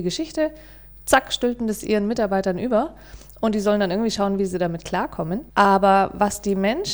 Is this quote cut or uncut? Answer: cut